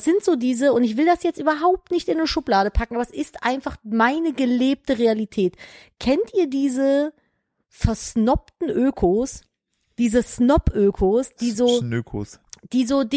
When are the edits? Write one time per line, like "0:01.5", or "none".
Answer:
none